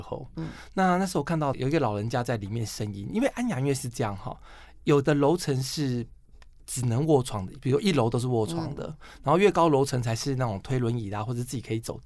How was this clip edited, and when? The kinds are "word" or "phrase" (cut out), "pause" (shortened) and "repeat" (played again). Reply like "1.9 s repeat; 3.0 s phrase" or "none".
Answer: none